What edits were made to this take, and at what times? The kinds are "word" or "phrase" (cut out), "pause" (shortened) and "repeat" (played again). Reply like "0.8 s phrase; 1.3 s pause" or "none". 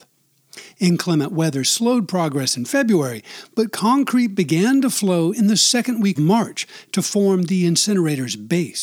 6.2 s word